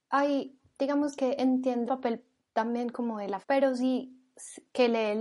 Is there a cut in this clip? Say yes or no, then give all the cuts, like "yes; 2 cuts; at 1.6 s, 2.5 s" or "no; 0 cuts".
yes; 3 cuts; at 1.9 s, 2.4 s, 3.4 s